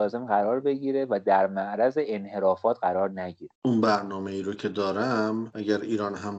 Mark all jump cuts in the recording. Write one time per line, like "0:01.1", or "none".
0:03.6